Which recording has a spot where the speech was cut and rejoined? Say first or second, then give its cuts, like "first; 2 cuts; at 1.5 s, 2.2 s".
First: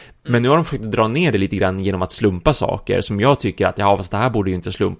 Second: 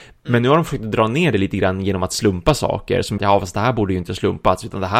second; 1 cut; at 3.2 s